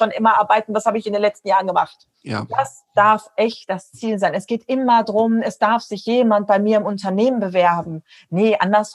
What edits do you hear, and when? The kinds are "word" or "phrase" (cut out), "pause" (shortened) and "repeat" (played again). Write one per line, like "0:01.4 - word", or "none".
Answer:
0:02.1 - pause